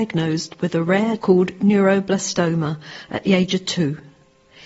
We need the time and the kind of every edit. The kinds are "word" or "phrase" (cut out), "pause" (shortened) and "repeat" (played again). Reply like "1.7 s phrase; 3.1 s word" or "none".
1.2 s phrase